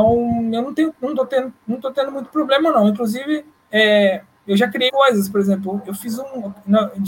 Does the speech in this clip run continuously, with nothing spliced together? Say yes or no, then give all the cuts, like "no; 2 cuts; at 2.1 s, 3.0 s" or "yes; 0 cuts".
no; 1 cut; at 4.9 s